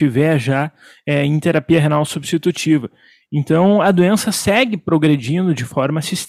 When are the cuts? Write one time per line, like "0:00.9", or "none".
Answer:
none